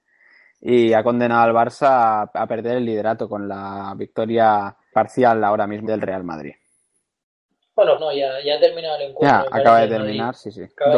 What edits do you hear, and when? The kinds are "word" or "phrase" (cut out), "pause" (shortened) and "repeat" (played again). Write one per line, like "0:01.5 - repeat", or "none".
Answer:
0:04.9 - word
0:05.9 - word
0:08.0 - word